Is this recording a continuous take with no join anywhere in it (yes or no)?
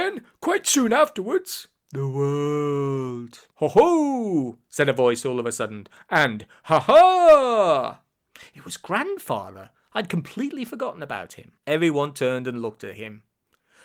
no